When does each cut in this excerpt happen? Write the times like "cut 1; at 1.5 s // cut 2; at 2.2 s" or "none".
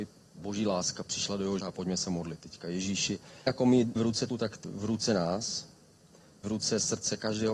cut 1; at 1.1 s // cut 2; at 1.6 s // cut 3; at 3.5 s // cut 4; at 4.0 s // cut 5; at 4.3 s // cut 6; at 4.6 s // cut 7; at 6.4 s